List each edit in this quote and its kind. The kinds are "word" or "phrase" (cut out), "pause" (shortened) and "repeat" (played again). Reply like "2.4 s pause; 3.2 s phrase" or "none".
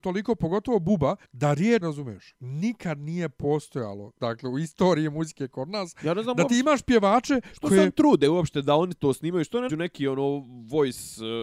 1.3 s pause; 1.8 s word; 9.7 s word